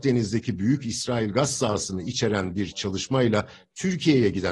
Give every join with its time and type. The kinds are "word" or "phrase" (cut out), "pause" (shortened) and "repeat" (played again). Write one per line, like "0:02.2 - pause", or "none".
none